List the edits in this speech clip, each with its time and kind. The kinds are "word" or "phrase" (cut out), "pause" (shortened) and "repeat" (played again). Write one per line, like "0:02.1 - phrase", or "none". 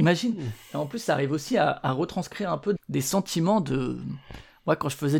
0:02.8 - word

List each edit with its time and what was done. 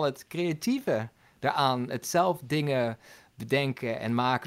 none

